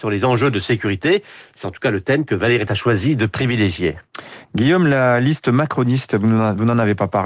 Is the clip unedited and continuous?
no; 1 cut; at 2.7 s

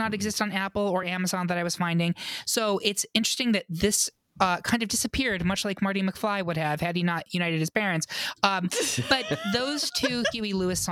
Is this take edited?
no; 0 cuts

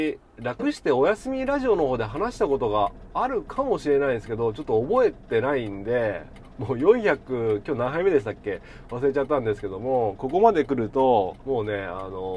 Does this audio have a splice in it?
yes; 2 cuts; at 6.4 s, 11.4 s

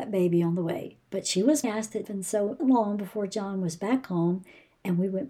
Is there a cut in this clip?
yes; 4 cuts; at 1.0 s, 1.6 s, 2.0 s, 2.6 s

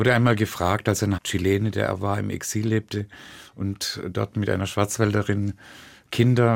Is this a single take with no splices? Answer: no; 1 cut; at 1.2 s

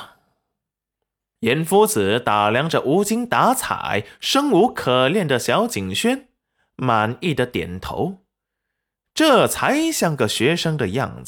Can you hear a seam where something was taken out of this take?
no; 0 cuts

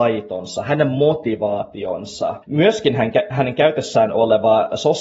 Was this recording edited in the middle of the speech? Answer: yes; 1 cut; at 2.4 s

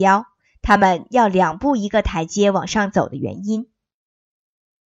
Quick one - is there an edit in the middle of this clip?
no; 0 cuts

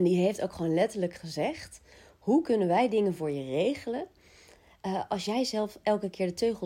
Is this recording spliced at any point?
no; 0 cuts

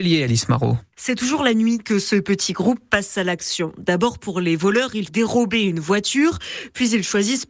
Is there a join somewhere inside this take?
yes; 1 cut; at 5.1 s

